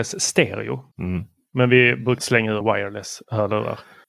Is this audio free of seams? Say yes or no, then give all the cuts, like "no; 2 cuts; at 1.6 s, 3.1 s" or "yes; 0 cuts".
no; 3 cuts; at 0.9 s, 2.2 s, 2.6 s